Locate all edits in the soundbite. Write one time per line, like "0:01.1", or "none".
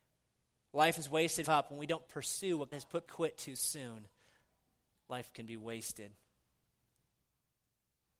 0:01.4
0:02.1
0:02.7
0:03.1